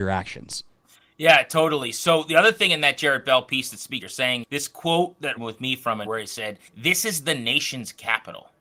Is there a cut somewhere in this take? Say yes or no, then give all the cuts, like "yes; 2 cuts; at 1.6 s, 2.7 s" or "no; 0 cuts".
yes; 5 cuts; at 4.0 s, 4.4 s, 5.4 s, 6.1 s, 6.7 s